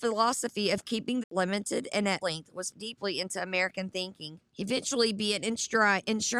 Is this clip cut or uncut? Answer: cut